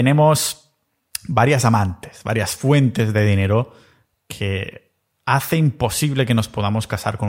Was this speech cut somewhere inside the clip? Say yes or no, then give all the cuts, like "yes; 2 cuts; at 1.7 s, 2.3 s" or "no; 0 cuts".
no; 0 cuts